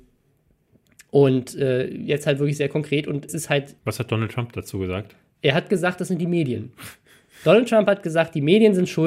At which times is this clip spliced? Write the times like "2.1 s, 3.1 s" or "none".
3.3 s, 3.8 s